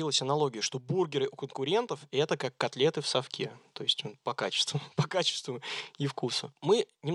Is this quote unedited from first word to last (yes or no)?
yes